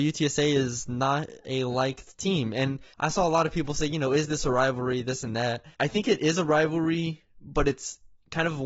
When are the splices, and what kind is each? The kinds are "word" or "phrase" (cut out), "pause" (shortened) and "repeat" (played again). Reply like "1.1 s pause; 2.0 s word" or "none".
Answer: 2.9 s pause; 5.7 s pause

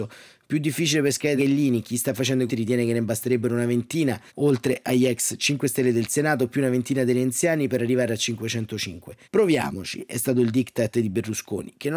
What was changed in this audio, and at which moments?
1.4 s phrase; 2.5 s word; 4.3 s pause; 9.2 s pause

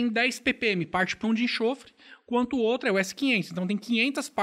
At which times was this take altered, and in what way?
1.2 s word

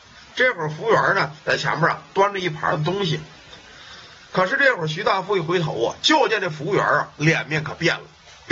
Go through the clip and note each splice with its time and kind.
1.4 s word

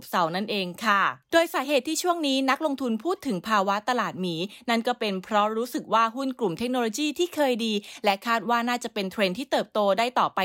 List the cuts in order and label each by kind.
1.2 s pause

